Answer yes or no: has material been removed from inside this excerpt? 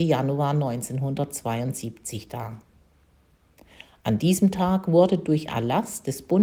yes